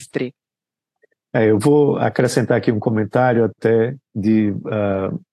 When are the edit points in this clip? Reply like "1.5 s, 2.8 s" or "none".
4.1 s